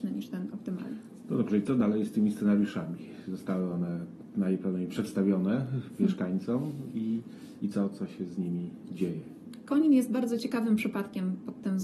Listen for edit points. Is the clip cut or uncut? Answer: uncut